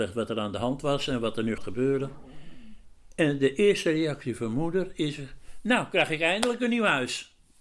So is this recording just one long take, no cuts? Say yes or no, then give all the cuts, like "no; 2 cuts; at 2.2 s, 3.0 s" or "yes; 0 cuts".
no; 1 cut; at 1.6 s